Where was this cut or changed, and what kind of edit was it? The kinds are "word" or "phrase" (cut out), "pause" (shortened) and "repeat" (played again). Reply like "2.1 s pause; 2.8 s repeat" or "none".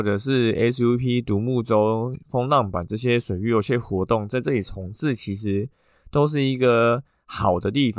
none